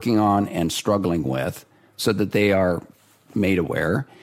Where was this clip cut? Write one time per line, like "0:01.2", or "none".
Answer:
none